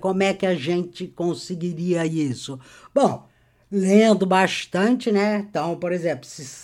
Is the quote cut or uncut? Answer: uncut